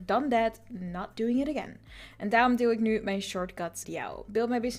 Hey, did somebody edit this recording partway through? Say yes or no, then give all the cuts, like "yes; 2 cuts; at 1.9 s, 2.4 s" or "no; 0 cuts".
yes; 1 cut; at 3.8 s